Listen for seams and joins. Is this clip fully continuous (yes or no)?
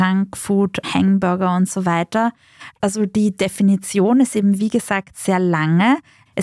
yes